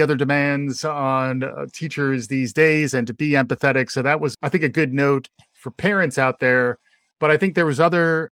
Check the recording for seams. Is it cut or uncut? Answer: uncut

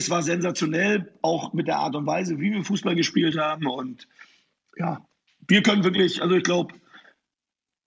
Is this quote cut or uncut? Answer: uncut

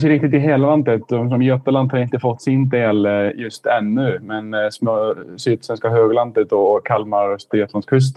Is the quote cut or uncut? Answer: uncut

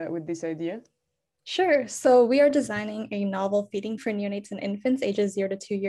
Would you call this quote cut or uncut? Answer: cut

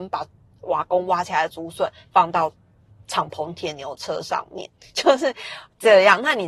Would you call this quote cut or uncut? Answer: uncut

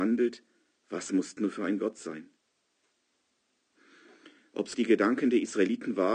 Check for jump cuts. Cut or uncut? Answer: cut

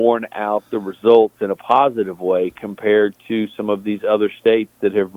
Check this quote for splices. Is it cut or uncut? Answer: uncut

